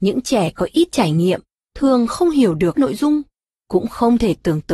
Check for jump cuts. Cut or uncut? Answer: cut